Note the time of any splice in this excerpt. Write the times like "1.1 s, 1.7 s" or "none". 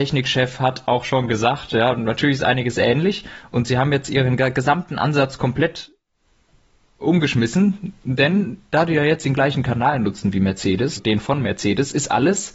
11.0 s